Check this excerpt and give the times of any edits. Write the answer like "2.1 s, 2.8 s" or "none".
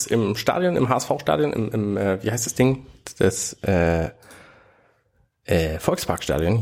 none